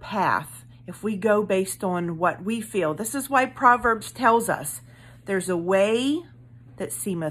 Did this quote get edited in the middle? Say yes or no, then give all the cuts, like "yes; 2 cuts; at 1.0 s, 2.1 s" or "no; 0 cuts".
no; 0 cuts